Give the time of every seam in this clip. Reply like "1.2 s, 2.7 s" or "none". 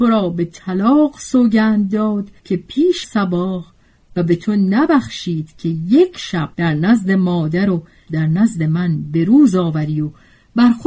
2.4 s, 3.0 s, 4.2 s, 6.5 s, 8.1 s